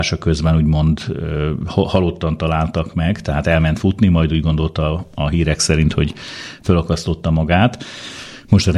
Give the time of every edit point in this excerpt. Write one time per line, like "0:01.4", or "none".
none